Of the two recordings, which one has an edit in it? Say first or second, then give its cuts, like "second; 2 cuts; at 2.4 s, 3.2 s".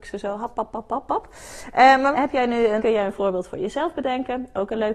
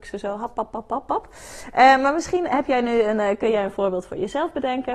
first; 2 cuts; at 2.1 s, 2.8 s